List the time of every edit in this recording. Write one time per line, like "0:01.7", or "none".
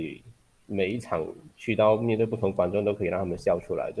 0:01.5